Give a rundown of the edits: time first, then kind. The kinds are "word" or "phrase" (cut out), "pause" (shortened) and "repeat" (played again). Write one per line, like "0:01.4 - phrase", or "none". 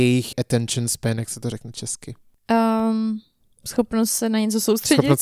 none